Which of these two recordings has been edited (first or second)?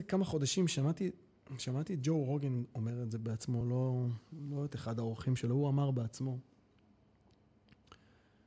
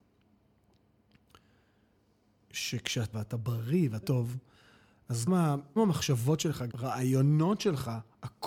second